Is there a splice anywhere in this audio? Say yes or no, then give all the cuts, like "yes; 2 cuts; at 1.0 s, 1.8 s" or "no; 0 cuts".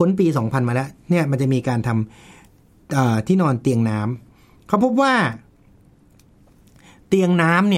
no; 0 cuts